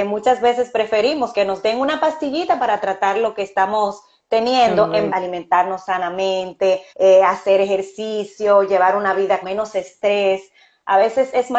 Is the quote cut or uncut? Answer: cut